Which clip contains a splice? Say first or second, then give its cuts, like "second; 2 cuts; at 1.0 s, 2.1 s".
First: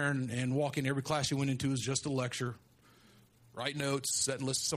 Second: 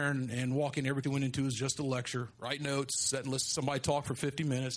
second; 2 cuts; at 1.0 s, 2.3 s